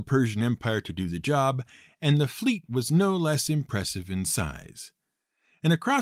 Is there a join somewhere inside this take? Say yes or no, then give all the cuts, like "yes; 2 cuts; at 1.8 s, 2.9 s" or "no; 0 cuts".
no; 0 cuts